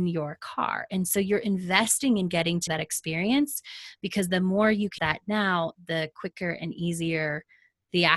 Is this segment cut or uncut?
cut